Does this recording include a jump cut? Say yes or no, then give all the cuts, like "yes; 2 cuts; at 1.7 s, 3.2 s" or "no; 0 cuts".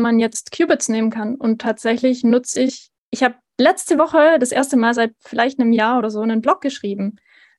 yes; 1 cut; at 3.0 s